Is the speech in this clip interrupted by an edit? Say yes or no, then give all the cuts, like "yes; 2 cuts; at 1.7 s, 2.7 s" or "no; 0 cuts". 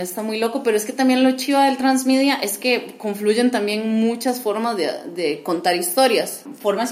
no; 0 cuts